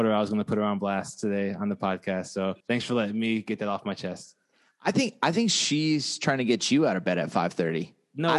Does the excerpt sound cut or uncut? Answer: cut